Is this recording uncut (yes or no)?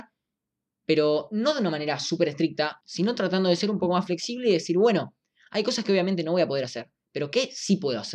yes